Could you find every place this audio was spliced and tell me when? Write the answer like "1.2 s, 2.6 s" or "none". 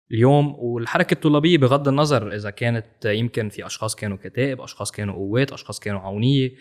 none